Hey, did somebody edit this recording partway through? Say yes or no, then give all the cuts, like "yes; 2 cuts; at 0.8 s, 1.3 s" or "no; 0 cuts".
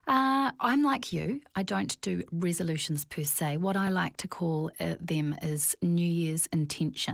no; 0 cuts